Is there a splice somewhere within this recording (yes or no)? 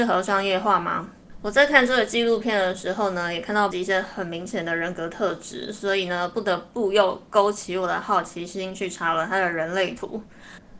yes